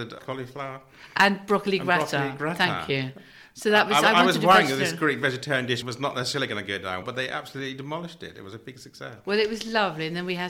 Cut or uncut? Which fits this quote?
cut